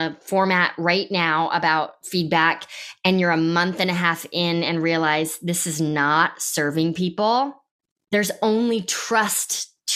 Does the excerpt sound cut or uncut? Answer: uncut